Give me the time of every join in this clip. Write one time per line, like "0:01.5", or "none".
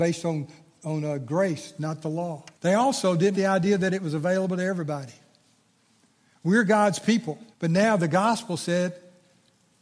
0:02.5
0:03.3
0:07.5